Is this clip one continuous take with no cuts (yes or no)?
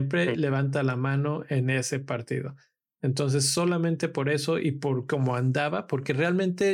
yes